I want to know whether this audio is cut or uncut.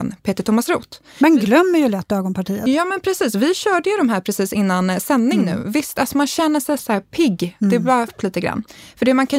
cut